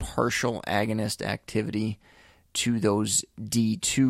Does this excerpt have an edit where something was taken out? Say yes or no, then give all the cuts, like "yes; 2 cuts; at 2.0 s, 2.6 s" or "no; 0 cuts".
no; 0 cuts